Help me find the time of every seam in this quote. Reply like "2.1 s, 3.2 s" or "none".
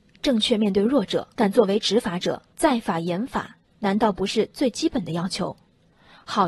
1.3 s, 2.5 s